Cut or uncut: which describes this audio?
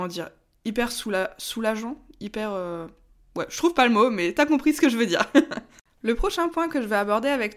uncut